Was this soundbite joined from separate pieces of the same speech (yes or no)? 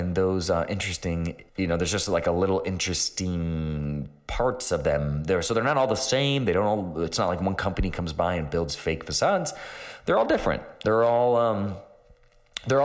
yes